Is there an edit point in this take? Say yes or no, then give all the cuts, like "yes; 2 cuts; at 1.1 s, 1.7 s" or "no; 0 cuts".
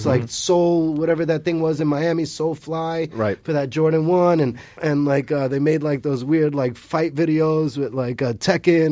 no; 0 cuts